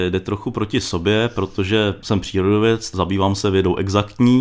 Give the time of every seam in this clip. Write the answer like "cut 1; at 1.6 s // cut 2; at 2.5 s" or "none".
none